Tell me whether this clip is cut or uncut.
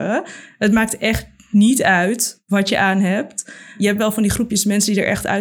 uncut